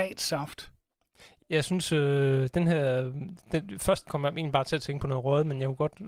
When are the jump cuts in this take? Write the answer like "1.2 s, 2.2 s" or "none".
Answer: 1.4 s